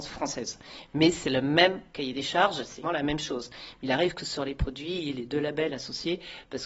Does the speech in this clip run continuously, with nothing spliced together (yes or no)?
no